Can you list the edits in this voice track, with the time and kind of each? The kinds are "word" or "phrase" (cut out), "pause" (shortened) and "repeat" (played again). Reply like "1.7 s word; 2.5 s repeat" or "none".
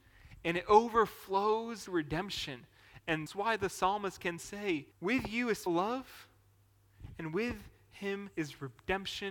1.9 s word; 3.3 s word; 4.4 s word; 4.9 s pause; 5.7 s word; 8.3 s pause

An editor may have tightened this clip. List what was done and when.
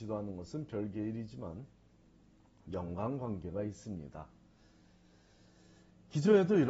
none

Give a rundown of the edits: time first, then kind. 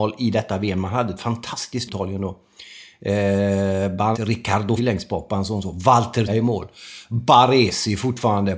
1.9 s word; 4.1 s word; 4.8 s word; 6.3 s word

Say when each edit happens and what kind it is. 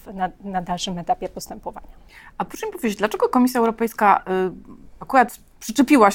none

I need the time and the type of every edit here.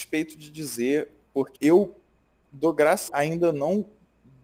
1.6 s word; 3.1 s phrase

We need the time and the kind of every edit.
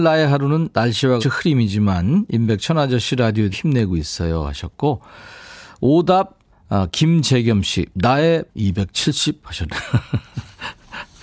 1.2 s word; 3.5 s word; 8.5 s word

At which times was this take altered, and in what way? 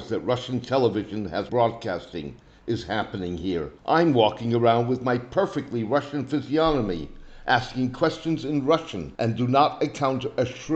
1.5 s word; 3.8 s pause; 9.2 s pause

